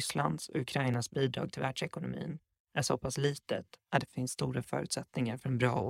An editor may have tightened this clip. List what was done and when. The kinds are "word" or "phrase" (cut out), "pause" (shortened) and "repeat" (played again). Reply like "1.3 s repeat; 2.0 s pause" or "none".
none